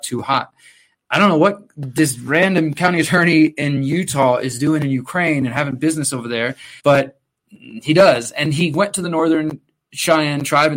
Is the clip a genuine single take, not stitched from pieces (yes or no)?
no